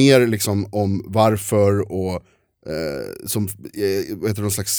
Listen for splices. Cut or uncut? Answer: uncut